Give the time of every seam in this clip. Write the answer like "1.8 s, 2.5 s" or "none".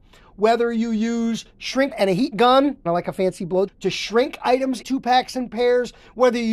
1.9 s, 2.3 s, 2.9 s, 3.7 s, 4.8 s